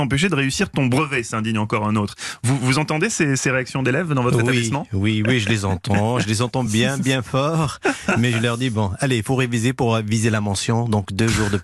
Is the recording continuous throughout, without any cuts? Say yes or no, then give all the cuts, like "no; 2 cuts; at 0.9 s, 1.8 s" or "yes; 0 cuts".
yes; 0 cuts